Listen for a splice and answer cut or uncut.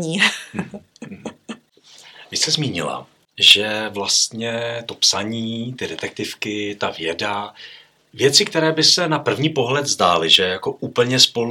uncut